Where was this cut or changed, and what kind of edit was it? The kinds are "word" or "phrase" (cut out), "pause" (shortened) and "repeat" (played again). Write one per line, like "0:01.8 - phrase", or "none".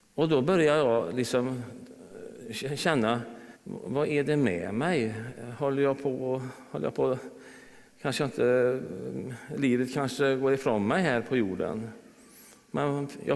0:03.6 - pause